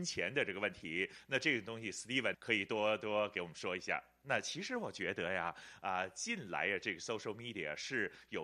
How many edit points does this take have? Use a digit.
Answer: 1